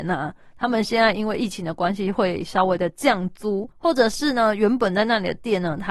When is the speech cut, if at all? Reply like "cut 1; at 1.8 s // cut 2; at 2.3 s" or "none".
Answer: cut 1; at 3.7 s